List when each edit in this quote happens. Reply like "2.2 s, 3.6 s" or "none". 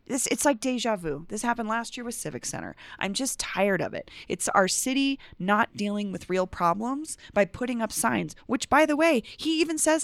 none